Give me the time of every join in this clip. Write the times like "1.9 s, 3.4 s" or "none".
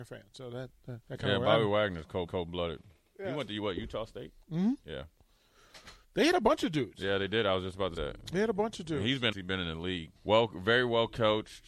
1.0 s, 2.3 s, 6.0 s, 8.0 s, 9.3 s, 10.2 s